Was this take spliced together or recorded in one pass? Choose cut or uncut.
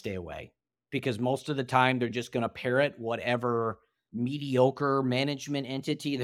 uncut